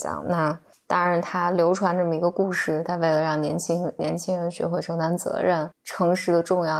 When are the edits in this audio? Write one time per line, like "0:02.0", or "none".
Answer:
0:05.7